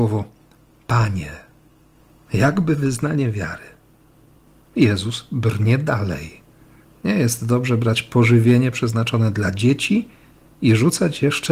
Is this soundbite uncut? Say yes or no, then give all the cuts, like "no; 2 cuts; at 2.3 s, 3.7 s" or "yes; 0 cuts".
yes; 0 cuts